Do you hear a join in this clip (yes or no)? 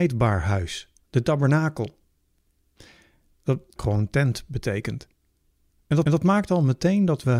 yes